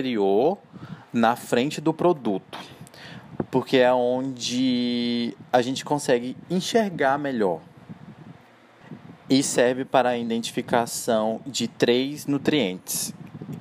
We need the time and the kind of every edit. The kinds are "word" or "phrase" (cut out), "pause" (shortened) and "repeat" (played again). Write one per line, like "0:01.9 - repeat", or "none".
none